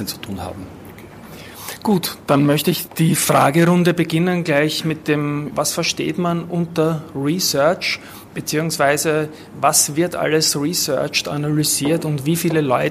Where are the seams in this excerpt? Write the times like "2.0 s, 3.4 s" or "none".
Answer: 5.5 s